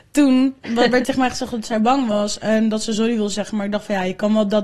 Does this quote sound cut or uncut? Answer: cut